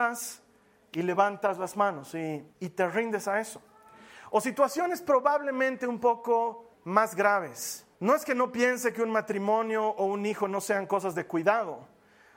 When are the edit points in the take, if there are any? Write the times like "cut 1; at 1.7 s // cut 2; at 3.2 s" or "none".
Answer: cut 1; at 2.5 s // cut 2; at 6.7 s // cut 3; at 7.9 s